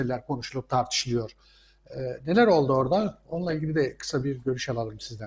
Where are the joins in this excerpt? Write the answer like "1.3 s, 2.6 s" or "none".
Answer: none

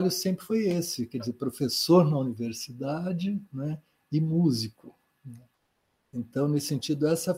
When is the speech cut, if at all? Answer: none

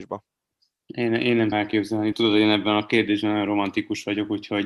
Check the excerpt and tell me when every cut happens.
1.5 s, 2.1 s

